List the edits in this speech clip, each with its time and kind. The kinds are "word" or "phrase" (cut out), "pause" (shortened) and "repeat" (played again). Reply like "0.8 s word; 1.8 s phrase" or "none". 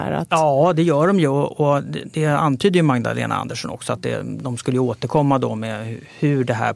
none